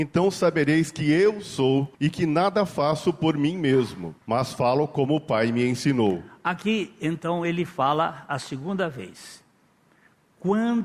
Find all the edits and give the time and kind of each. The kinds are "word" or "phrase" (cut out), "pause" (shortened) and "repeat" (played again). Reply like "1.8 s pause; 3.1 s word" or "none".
1.9 s pause; 4.2 s pause